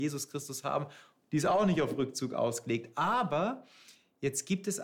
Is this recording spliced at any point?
no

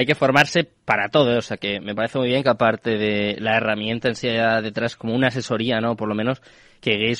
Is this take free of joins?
yes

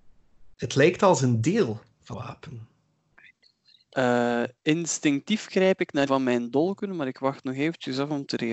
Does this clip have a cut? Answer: yes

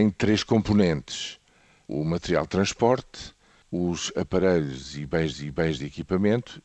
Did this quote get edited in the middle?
yes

